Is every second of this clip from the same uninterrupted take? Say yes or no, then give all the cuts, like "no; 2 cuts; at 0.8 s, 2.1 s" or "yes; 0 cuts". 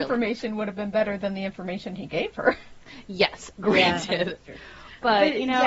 yes; 0 cuts